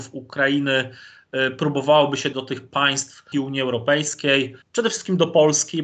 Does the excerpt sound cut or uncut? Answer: cut